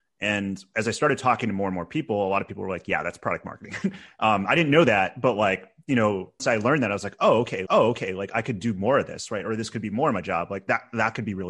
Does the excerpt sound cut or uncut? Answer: cut